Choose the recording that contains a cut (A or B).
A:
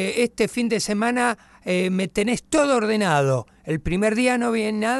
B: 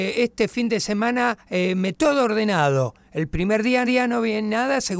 B